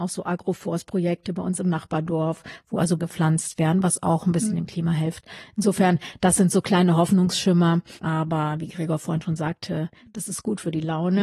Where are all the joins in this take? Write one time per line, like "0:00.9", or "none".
0:03.0
0:08.0